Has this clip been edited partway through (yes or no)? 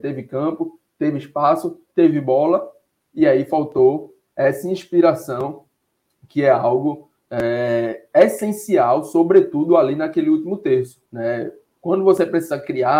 yes